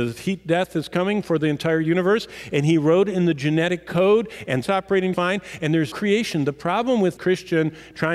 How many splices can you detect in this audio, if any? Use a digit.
4